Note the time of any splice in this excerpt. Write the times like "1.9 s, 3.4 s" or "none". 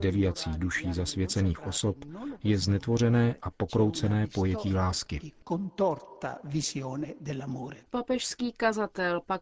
7.9 s

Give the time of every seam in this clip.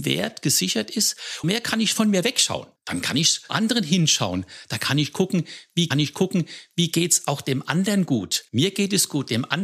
1.4 s, 2.8 s, 3.5 s, 5.9 s, 8.5 s

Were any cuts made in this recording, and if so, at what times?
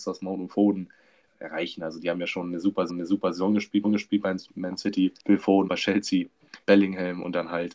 1.3 s, 2.9 s, 3.8 s, 5.2 s, 5.7 s, 6.6 s

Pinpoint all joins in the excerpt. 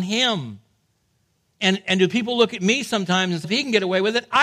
3.4 s

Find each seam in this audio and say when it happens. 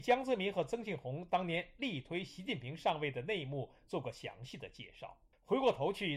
none

